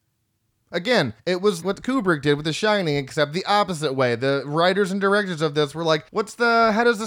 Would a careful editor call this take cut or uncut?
cut